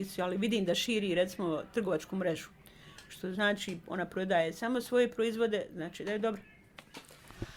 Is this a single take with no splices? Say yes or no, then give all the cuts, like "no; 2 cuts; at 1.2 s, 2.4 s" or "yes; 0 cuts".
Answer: yes; 0 cuts